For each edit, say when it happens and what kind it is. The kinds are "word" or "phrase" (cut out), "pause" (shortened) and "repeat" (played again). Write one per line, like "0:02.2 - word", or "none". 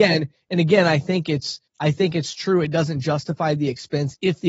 0:01.7 - pause